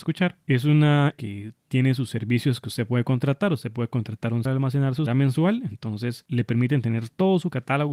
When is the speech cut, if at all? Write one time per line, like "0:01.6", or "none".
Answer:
0:01.1
0:04.4
0:05.1